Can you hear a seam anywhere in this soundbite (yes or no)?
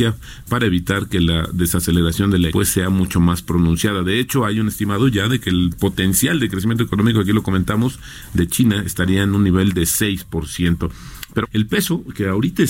yes